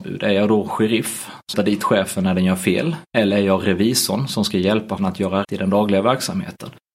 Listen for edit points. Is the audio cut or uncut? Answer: cut